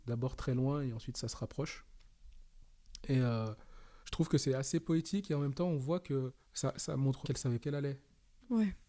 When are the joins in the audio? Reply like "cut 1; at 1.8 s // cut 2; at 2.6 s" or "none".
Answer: cut 1; at 4.0 s // cut 2; at 6.4 s // cut 3; at 7.2 s // cut 4; at 7.6 s